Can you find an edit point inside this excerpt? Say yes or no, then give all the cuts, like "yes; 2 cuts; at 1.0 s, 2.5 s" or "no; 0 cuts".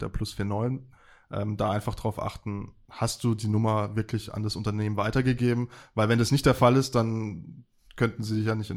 no; 0 cuts